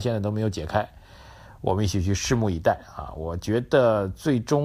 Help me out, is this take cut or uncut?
uncut